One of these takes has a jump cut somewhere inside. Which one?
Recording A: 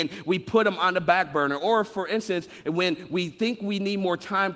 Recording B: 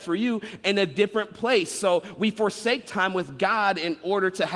B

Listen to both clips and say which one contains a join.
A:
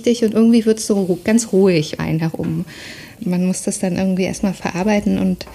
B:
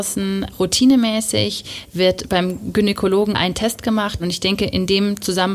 A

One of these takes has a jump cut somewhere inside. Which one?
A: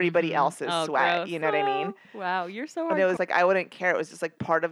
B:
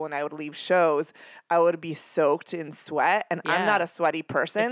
A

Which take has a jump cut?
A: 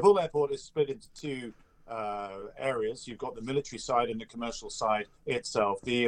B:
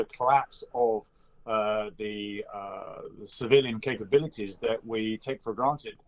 A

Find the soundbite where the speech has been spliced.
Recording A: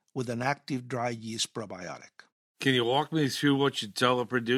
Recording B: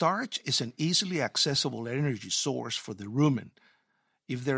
A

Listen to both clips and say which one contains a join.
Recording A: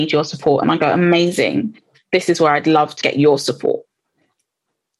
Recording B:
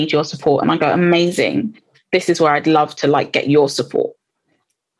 A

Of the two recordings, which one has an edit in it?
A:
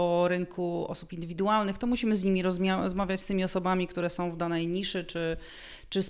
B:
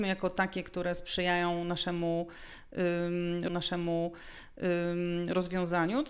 B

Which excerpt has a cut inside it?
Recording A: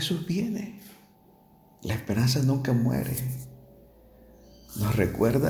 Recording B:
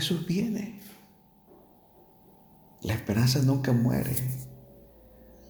A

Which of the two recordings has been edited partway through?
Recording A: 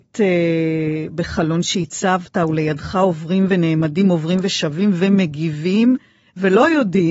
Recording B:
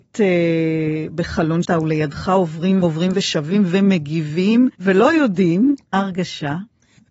B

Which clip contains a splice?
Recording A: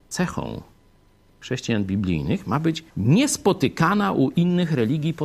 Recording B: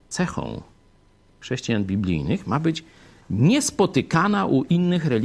A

